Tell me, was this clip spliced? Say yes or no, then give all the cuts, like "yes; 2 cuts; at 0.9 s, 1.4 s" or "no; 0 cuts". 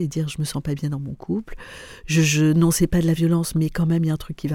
no; 0 cuts